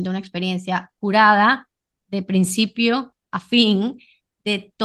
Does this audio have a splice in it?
no; 0 cuts

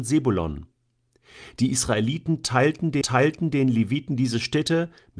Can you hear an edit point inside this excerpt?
yes; 1 cut; at 3.0 s

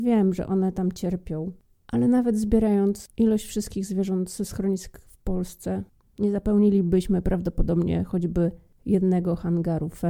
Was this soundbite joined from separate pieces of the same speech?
yes; 1 cut; at 3.1 s

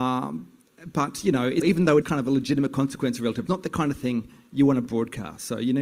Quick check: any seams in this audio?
yes; 3 cuts; at 1.6 s, 2.0 s, 3.5 s

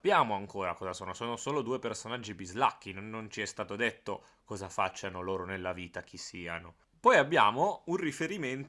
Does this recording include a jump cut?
no; 0 cuts

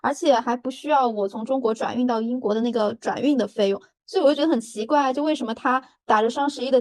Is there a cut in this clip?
no; 0 cuts

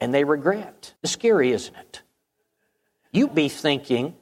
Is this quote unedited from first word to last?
no; 2 cuts; at 1.0 s, 3.3 s

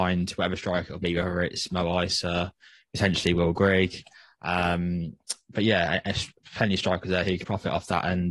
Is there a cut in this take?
yes; 1 cut; at 7.4 s

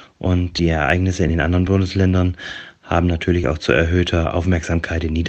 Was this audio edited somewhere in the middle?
no; 0 cuts

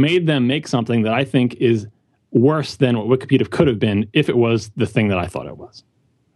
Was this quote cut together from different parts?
no; 0 cuts

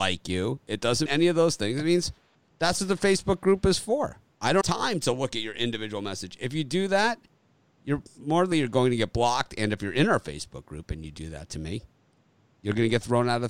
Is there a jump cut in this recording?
yes; 3 cuts; at 1.1 s, 4.6 s, 8.5 s

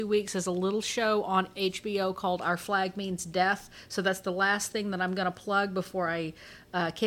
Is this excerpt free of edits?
yes; 0 cuts

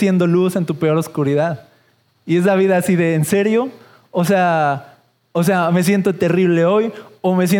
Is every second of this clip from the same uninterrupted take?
yes; 0 cuts

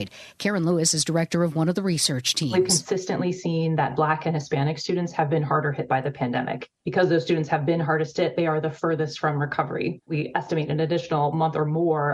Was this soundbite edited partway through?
no; 0 cuts

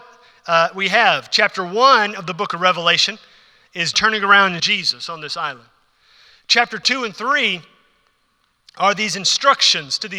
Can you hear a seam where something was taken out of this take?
yes; 2 cuts; at 3.9 s, 4.6 s

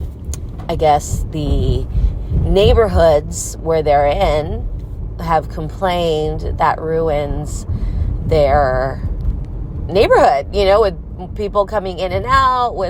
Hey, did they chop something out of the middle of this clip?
yes; 1 cut; at 6.6 s

